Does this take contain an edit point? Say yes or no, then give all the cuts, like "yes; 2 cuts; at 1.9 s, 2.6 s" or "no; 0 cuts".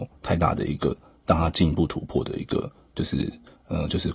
no; 0 cuts